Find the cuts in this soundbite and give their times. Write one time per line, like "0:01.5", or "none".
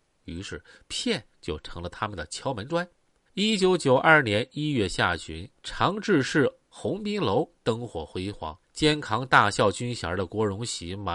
0:01.3
0:03.1
0:05.6
0:08.6